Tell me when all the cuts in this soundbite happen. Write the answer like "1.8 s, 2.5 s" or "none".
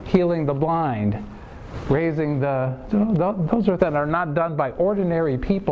2.9 s, 3.8 s